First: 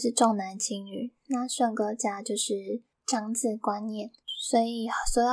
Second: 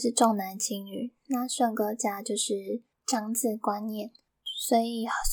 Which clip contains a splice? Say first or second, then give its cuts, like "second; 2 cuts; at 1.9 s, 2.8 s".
first; 1 cut; at 4.2 s